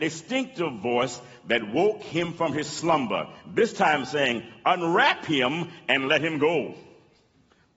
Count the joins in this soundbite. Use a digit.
0